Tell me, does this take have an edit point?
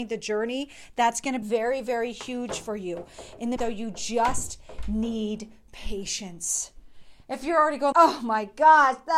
yes; 3 cuts; at 1.4 s, 3.6 s, 7.9 s

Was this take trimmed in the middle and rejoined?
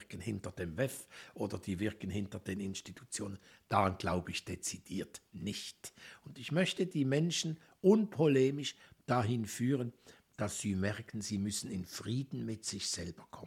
no; 0 cuts

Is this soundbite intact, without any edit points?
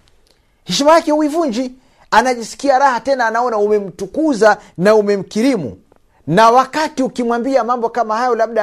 no; 1 cut; at 6.1 s

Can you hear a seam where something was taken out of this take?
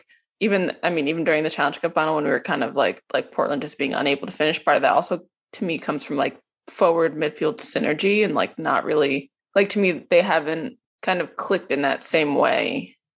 yes; 1 cut; at 3.0 s

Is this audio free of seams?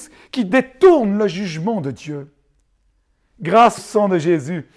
no; 1 cut; at 3.8 s

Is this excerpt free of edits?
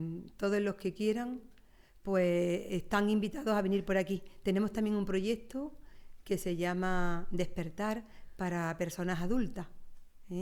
yes; 0 cuts

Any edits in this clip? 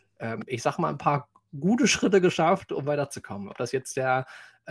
no; 0 cuts

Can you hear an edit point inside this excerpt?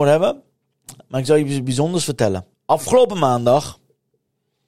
yes; 1 cut; at 2.5 s

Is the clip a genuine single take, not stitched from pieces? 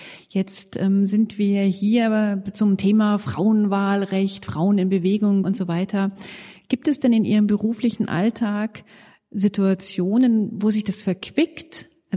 no; 1 cut; at 5.4 s

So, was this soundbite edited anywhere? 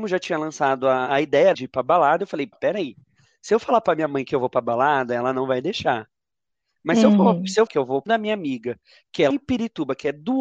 yes; 6 cuts; at 1.1 s, 1.5 s, 2.5 s, 7.7 s, 8.1 s, 9.3 s

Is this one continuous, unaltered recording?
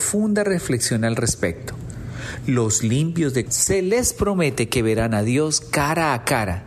no; 1 cut; at 3.5 s

